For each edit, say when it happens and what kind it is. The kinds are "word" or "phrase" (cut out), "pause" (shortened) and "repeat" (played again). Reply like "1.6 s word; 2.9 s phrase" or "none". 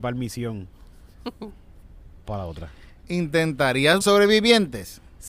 2.2 s word; 4.0 s word